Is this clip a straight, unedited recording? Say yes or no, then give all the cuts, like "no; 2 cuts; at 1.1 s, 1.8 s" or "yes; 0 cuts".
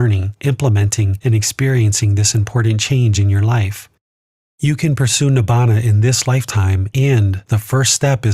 yes; 0 cuts